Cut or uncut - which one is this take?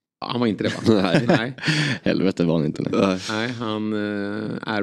uncut